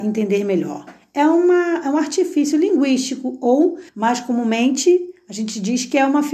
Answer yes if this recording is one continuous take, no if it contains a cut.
no